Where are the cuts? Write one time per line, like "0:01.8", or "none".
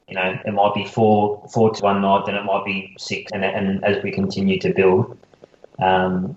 0:01.8
0:03.3